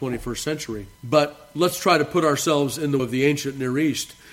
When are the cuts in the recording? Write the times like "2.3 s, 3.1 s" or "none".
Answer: 0.9 s, 3.0 s